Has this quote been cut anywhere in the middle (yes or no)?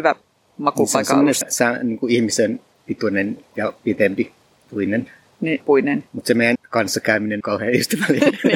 yes